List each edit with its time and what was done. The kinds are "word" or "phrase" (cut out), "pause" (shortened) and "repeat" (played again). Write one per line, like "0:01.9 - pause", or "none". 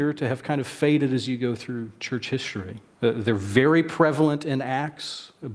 0:02.9 - pause